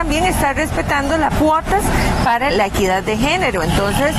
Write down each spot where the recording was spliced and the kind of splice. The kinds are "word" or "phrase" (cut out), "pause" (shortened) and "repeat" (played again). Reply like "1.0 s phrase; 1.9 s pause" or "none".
1.3 s phrase; 2.5 s word